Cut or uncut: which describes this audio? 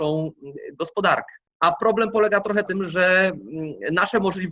cut